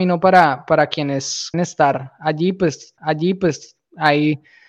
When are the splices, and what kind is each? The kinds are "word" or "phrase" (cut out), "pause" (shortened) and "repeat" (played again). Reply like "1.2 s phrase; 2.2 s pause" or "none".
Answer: 1.5 s word; 3.0 s repeat